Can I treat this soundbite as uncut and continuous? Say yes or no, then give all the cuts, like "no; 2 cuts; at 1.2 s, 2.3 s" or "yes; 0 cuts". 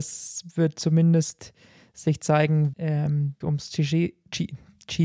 no; 2 cuts; at 2.7 s, 3.4 s